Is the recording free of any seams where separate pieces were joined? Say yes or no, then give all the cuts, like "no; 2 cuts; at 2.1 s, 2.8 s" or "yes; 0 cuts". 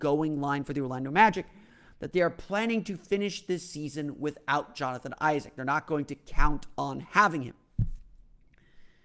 yes; 0 cuts